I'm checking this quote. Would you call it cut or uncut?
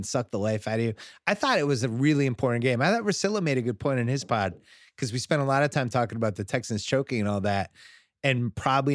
uncut